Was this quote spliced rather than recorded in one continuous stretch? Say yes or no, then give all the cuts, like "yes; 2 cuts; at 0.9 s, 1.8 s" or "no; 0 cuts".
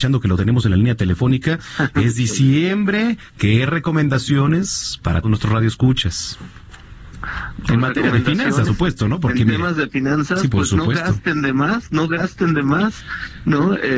yes; 2 cuts; at 5.2 s, 8.7 s